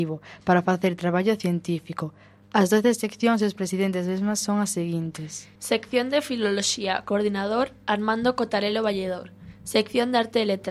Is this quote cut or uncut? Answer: cut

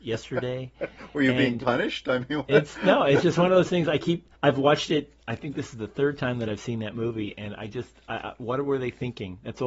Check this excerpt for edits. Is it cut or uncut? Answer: cut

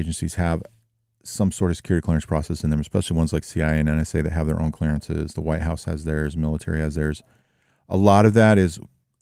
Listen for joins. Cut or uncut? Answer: uncut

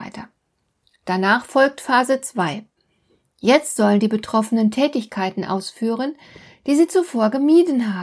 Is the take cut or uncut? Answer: uncut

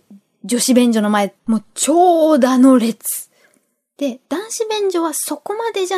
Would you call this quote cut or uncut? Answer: cut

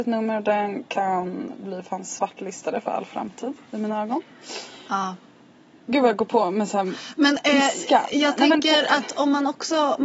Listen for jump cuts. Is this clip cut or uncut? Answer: uncut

